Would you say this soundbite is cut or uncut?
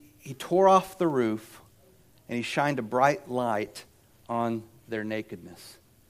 uncut